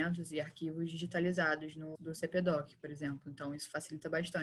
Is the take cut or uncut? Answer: cut